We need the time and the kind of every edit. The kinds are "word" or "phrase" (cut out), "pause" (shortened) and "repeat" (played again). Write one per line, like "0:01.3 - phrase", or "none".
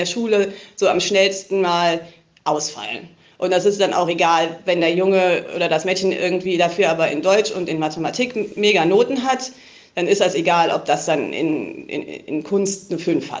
none